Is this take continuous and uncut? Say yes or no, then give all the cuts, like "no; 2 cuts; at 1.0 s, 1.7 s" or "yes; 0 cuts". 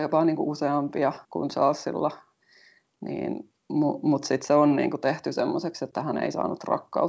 no; 2 cuts; at 1.2 s, 3.6 s